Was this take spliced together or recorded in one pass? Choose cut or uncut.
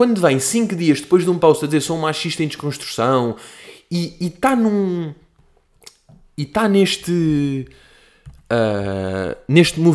uncut